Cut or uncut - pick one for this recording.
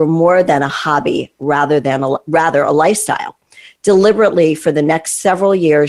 uncut